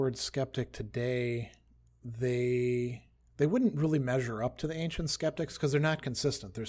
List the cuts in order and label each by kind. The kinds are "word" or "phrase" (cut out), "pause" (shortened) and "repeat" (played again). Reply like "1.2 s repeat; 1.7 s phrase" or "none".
none

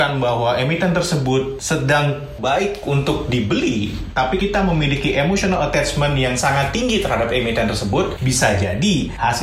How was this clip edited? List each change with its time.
2.4 s word; 4.4 s word

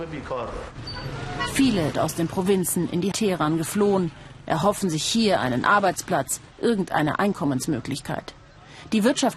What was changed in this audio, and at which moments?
1.9 s word; 3.1 s word

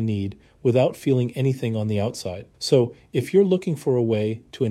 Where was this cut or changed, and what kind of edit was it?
2.5 s pause

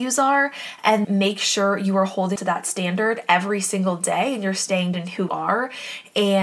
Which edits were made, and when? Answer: 1.0 s word; 2.4 s word; 4.9 s word; 5.3 s word

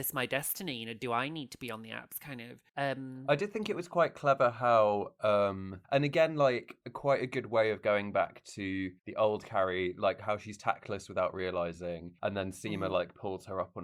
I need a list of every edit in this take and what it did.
2.7 s pause; 5.8 s pause; 9.0 s pause; 12.2 s pause

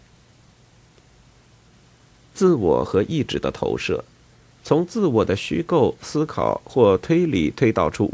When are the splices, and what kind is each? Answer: 4.2 s pause

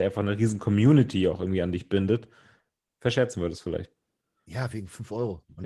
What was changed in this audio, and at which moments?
none

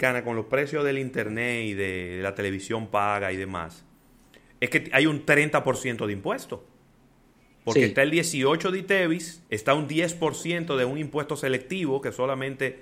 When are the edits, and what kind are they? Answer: 9.5 s pause

